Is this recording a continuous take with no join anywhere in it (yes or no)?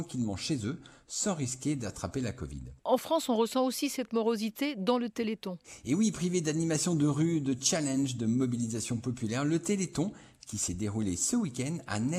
yes